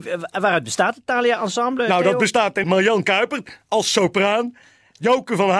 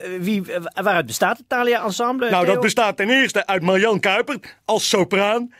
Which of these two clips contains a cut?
first; 1 cut; at 2.6 s

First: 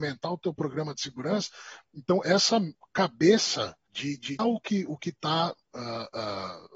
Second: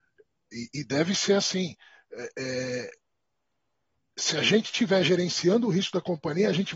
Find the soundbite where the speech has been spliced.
first; 3 cuts; at 2.2 s, 3.9 s, 4.4 s

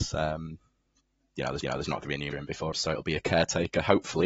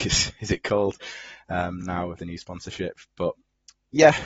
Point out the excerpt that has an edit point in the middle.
first; 3 cuts; at 1.6 s, 2.3 s, 2.7 s

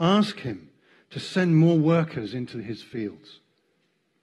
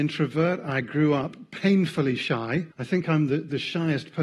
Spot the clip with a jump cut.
second; 1 cut; at 2.7 s

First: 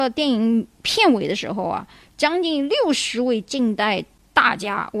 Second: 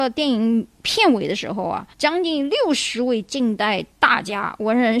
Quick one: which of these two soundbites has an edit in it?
second; 2 cuts; at 1.9 s, 3.9 s

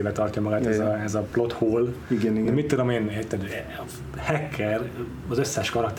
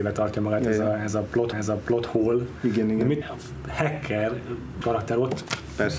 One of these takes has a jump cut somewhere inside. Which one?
second; 3 cuts; at 1.5 s, 3.2 s, 4.8 s

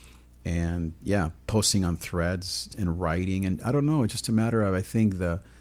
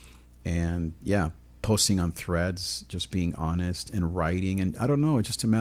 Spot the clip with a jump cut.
first; 2 cuts; at 1.4 s, 2.7 s

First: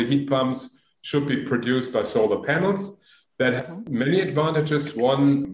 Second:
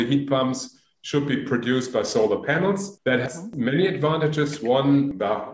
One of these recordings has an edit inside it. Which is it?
second; 1 cut; at 3.0 s

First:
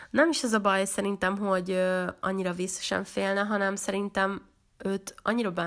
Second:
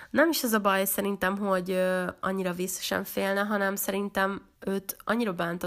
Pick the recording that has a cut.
second; 1 cut; at 4.6 s

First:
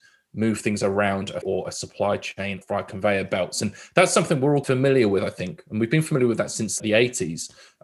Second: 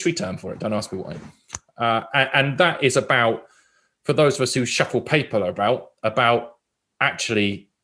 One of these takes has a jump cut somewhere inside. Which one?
first; 4 cuts; at 1.4 s, 2.6 s, 4.6 s, 6.8 s

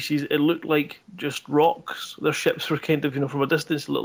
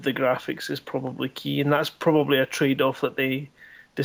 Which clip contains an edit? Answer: first; 1 cut; at 1.0 s

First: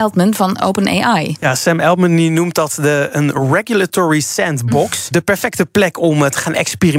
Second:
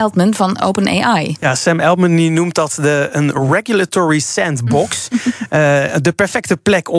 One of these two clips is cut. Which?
first; 1 cut; at 5.1 s

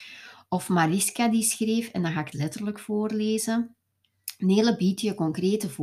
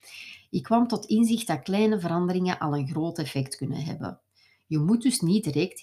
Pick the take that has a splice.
first; 1 cut; at 2.3 s

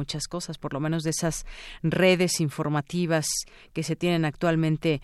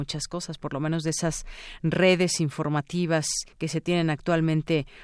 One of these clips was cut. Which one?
second; 1 cut; at 3.5 s

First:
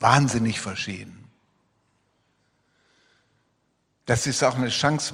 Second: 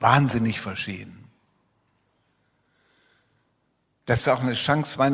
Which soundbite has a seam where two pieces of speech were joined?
second; 1 cut; at 4.2 s

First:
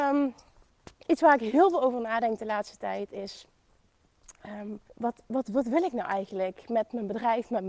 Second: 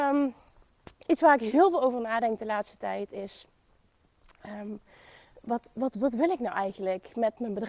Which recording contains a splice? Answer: first; 1 cut; at 4.9 s

